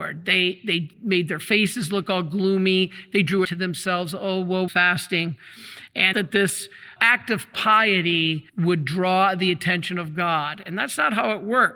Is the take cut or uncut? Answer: cut